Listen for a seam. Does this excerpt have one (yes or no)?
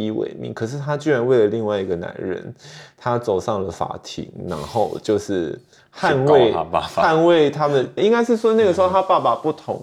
yes